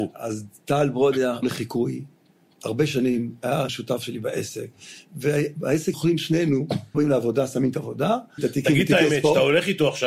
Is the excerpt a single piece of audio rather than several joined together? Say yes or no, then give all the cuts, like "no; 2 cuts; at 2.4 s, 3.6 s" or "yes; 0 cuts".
no; 6 cuts; at 1.4 s, 3.7 s, 5.9 s, 6.9 s, 7.7 s, 8.4 s